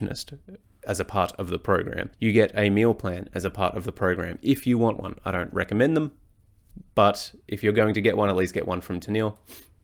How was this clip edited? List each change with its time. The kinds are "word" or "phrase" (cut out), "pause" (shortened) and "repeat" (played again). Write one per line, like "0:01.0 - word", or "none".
0:02.1 - pause